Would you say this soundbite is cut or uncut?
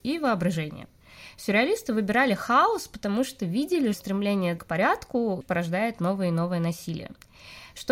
cut